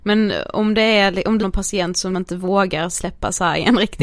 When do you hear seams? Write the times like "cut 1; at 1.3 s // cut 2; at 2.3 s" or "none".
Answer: cut 1; at 1.4 s // cut 2; at 2.1 s